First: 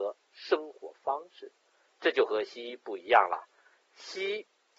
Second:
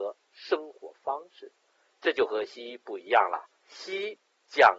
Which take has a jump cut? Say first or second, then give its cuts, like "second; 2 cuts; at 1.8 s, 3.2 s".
second; 1 cut; at 3.5 s